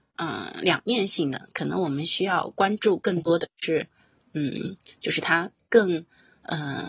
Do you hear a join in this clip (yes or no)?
no